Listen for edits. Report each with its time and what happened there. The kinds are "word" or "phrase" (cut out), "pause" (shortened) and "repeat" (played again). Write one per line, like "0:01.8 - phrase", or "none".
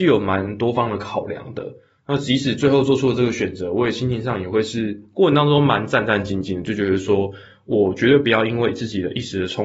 none